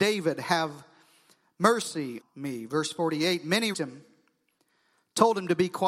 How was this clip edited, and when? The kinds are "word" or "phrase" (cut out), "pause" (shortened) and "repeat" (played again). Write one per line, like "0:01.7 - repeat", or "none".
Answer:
0:02.2 - word
0:03.7 - word